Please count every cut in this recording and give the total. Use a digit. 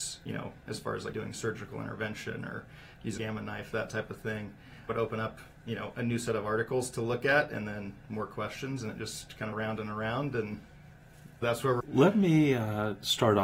6